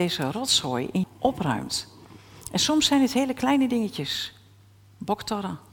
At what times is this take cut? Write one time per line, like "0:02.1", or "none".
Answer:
0:01.0